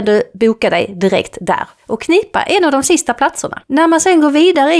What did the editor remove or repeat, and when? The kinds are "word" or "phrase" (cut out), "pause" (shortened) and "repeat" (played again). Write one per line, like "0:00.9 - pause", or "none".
none